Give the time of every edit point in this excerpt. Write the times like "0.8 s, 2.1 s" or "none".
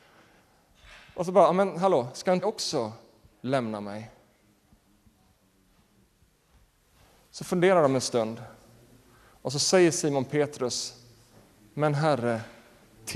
2.4 s